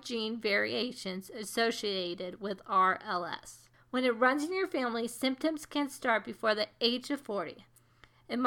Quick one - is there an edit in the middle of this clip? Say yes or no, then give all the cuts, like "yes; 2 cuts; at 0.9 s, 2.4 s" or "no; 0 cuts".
yes; 1 cut; at 3.7 s